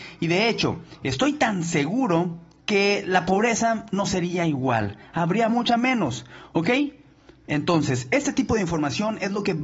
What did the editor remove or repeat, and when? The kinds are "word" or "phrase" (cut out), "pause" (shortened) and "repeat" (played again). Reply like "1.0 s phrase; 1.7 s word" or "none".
2.6 s pause; 5.5 s word